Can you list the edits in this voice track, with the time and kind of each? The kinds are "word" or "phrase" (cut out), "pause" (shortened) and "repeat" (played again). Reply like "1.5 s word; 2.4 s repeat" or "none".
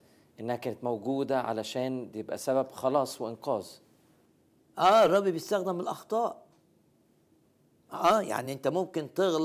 none